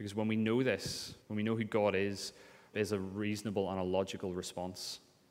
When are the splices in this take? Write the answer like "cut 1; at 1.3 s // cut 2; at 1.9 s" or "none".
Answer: cut 1; at 1.2 s // cut 2; at 2.7 s